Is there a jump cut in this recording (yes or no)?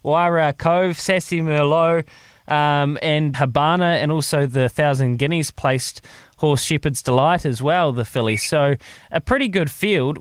yes